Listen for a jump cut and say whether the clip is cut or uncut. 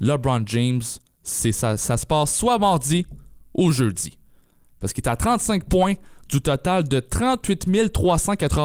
uncut